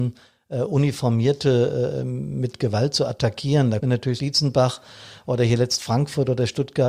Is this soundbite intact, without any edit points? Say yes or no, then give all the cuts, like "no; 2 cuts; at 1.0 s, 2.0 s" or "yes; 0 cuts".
no; 2 cuts; at 3.8 s, 4.2 s